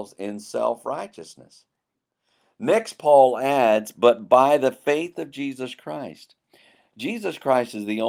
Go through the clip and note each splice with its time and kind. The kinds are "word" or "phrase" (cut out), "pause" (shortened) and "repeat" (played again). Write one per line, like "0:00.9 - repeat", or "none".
none